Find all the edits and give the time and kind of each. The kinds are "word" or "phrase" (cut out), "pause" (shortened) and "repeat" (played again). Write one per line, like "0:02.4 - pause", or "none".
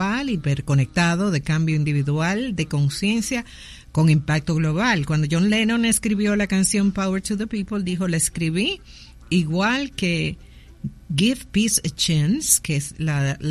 none